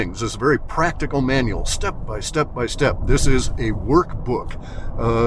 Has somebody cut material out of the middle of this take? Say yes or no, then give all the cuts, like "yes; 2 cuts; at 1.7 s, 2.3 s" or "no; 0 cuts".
no; 0 cuts